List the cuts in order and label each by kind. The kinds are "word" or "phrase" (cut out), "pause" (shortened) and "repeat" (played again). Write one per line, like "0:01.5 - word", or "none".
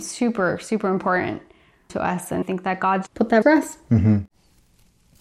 0:01.9 - word
0:02.4 - word
0:03.1 - word
0:03.4 - word